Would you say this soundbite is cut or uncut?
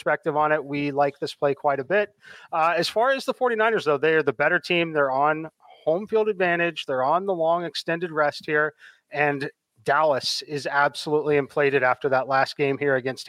uncut